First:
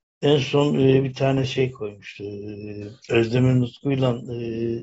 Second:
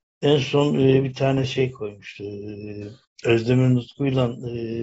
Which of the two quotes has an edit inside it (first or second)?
first